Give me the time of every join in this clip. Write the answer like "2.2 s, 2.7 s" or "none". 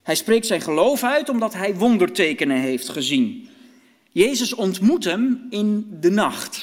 none